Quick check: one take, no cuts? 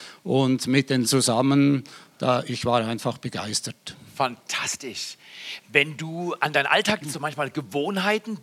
no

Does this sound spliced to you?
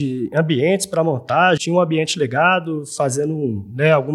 yes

